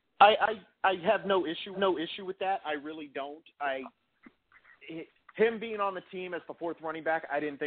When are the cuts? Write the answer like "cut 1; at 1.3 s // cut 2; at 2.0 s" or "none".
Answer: cut 1; at 1.7 s // cut 2; at 5.2 s